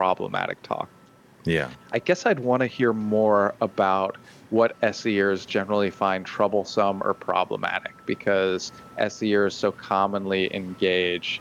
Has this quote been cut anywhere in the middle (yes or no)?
no